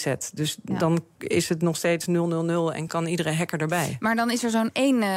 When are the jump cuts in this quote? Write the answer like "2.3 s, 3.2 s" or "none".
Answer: none